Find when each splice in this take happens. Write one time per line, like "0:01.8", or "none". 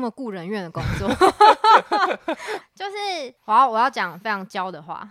0:03.4